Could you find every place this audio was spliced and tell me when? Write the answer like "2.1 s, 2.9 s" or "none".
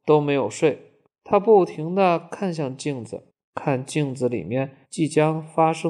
1.1 s, 3.3 s, 4.8 s